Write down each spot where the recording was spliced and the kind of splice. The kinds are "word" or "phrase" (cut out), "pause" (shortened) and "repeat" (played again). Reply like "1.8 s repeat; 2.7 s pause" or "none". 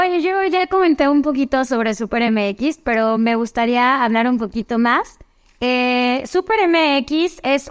none